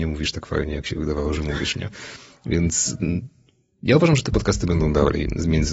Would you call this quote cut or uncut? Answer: uncut